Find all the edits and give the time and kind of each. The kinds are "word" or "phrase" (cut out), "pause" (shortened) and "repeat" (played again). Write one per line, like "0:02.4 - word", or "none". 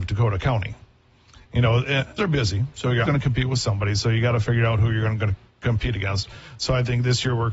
0:02.2 - word
0:03.1 - word